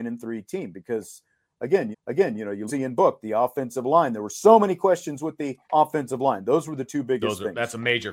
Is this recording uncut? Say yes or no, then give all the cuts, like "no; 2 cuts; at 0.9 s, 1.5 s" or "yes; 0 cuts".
no; 3 cuts; at 1.9 s, 2.7 s, 5.6 s